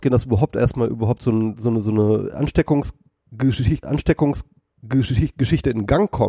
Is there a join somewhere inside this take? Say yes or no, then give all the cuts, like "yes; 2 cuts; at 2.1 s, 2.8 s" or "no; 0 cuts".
yes; 1 cut; at 3.8 s